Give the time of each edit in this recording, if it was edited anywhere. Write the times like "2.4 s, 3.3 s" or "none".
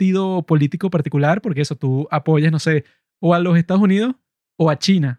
none